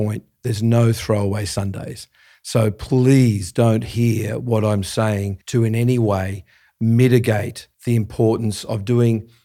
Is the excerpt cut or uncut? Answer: cut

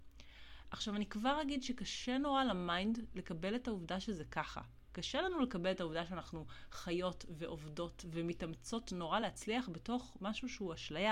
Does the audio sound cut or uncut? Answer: uncut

